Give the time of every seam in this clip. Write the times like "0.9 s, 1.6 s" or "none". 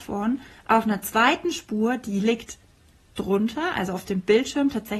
none

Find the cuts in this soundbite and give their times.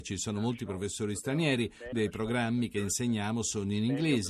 1.9 s

